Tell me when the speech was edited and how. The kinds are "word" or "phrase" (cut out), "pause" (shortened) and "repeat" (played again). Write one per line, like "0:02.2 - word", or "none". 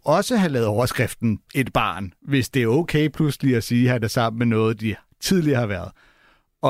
0:01.5 - word